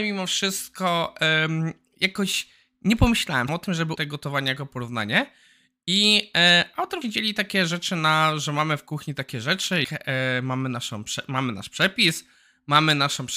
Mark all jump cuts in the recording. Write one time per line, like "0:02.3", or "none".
0:03.5
0:04.0
0:07.0
0:09.8

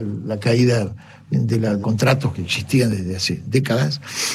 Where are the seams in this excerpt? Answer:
0:01.8

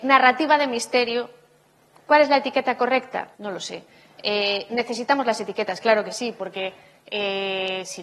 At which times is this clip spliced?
0:03.3

